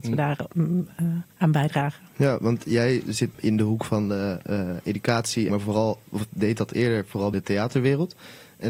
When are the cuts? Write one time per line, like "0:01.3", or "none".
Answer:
0:01.3
0:03.0
0:03.3
0:05.5
0:07.3